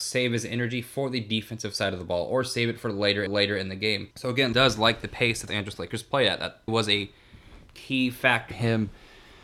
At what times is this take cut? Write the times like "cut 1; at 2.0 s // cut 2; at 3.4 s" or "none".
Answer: cut 1; at 3.3 s // cut 2; at 4.1 s // cut 3; at 4.5 s // cut 4; at 5.5 s // cut 5; at 6.7 s // cut 6; at 8.5 s